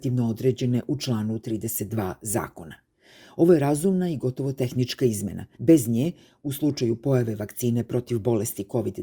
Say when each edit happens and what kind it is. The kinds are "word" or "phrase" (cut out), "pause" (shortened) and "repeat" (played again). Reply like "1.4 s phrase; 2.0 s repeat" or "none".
5.5 s pause